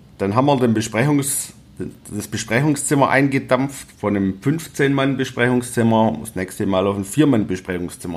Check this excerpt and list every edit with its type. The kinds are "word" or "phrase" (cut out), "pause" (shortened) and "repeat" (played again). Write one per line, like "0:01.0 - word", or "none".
none